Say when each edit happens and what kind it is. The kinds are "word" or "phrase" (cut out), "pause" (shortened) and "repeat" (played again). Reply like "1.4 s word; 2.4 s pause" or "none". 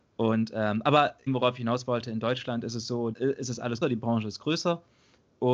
1.3 s word; 3.1 s word; 3.8 s word